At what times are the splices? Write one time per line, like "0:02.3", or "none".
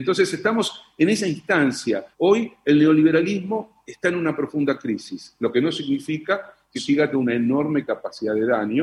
0:02.1
0:06.8
0:07.1